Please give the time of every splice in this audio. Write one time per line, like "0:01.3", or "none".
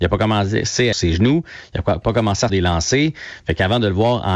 0:00.9
0:02.5